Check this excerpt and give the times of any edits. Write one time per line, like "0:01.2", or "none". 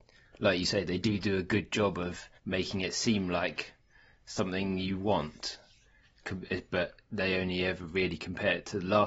0:02.4